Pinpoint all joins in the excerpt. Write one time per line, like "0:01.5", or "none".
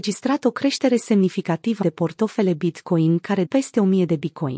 0:01.8
0:03.5

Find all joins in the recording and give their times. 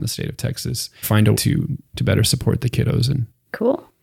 0:01.0
0:01.3
0:01.9

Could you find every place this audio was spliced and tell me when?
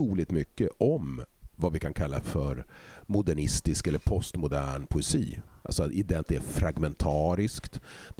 0:02.2
0:06.2

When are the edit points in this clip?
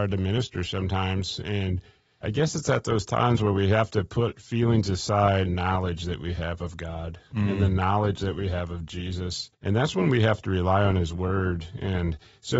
0:02.2
0:05.5
0:09.5

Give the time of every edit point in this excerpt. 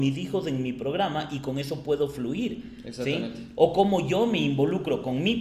none

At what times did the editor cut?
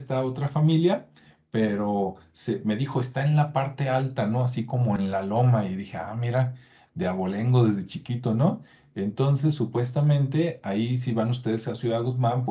none

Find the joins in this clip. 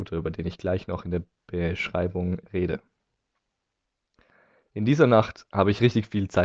none

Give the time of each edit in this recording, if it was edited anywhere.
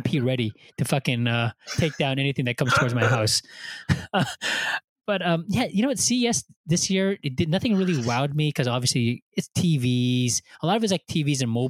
none

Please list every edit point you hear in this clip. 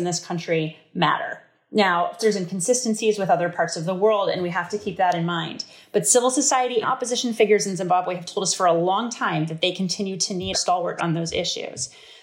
0:02.2
0:06.8
0:10.5
0:11.0

